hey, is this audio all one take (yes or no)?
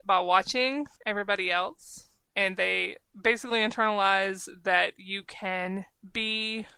yes